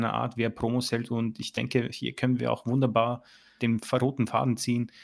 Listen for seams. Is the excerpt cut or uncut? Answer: cut